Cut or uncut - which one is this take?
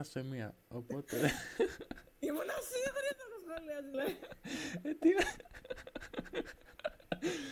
cut